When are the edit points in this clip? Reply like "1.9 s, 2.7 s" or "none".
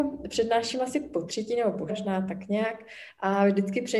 1.9 s